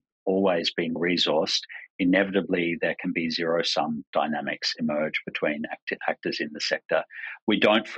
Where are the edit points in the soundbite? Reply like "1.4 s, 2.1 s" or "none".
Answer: 1.0 s